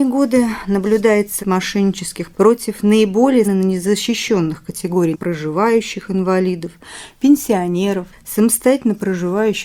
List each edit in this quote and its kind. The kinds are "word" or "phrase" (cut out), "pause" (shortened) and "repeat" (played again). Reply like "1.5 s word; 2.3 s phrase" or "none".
1.4 s word; 2.3 s phrase; 3.4 s word; 5.1 s phrase